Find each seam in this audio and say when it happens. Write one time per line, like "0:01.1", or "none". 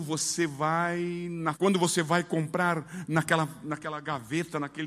0:01.5